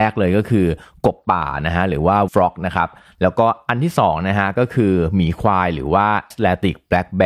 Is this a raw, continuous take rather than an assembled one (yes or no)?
no